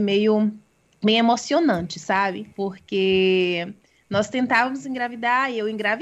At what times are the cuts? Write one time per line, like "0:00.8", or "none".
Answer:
0:02.5